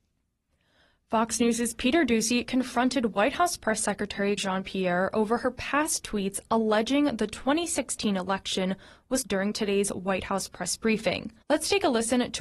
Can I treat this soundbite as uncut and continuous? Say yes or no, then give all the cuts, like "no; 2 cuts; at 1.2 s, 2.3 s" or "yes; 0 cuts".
no; 3 cuts; at 4.4 s, 9.2 s, 11.4 s